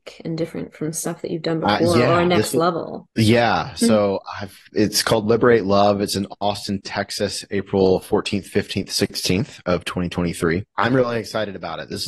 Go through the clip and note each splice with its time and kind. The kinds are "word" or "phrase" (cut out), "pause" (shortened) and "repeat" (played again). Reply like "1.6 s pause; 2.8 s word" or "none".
3.1 s pause; 4.7 s pause; 10.7 s pause